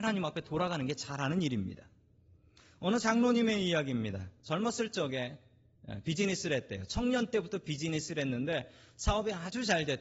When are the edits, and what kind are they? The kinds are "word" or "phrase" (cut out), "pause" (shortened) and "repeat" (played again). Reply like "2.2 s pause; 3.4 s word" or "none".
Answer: none